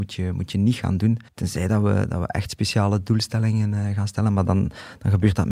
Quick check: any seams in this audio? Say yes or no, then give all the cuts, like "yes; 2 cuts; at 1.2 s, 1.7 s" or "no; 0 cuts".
yes; 1 cut; at 1.3 s